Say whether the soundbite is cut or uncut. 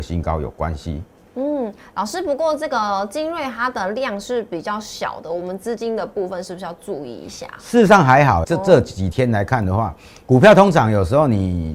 cut